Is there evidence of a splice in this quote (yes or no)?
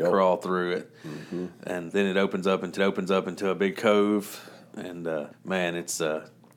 yes